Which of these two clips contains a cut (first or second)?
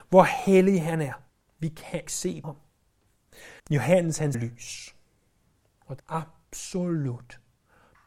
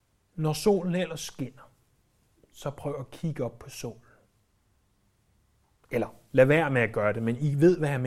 first